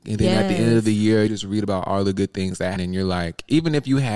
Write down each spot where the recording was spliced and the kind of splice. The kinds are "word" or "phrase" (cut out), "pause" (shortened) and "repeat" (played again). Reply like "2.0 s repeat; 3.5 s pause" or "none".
1.3 s word; 2.8 s word